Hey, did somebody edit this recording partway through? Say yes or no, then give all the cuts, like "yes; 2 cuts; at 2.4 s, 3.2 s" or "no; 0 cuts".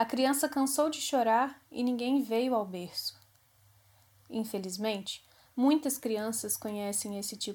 no; 0 cuts